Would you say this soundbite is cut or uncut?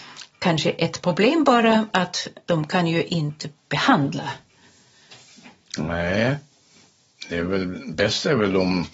cut